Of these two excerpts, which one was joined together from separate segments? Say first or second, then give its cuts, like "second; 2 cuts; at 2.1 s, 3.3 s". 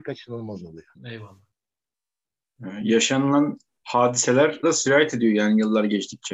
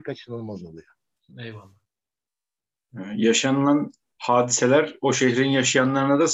first; 2 cuts; at 0.9 s, 4.6 s